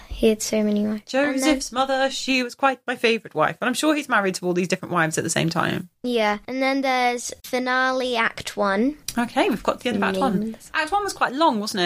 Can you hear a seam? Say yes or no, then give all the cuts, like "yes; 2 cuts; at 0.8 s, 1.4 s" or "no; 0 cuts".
no; 0 cuts